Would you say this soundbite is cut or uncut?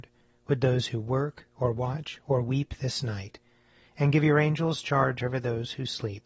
uncut